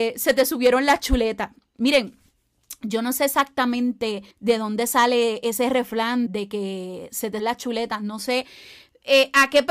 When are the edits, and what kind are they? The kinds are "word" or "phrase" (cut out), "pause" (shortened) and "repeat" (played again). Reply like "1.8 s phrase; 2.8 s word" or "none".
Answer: 4.3 s pause; 6.3 s word; 7.4 s word